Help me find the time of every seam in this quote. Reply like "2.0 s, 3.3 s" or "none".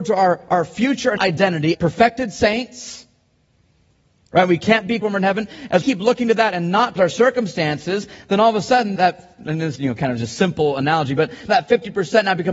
1.2 s, 1.7 s, 5.0 s, 5.8 s, 7.0 s, 9.0 s, 9.8 s, 11.5 s